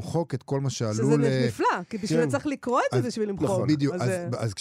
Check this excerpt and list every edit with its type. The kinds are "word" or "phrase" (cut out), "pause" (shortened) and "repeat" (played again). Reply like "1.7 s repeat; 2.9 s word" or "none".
none